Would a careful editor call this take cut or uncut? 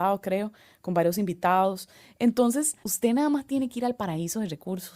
cut